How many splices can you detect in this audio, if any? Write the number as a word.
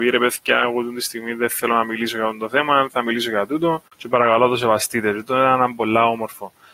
one